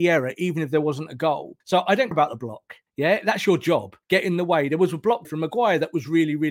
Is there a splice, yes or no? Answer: yes